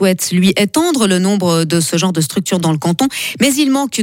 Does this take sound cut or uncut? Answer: uncut